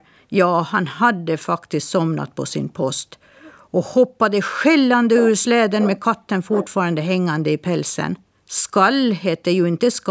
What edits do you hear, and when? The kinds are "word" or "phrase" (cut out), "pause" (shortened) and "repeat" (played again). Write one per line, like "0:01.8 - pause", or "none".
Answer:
0:08.4 - pause